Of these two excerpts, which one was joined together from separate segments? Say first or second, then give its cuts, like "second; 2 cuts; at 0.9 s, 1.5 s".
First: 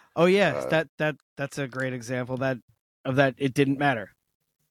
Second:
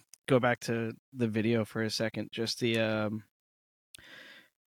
first; 1 cut; at 1.2 s